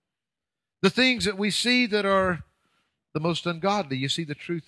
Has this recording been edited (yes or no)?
no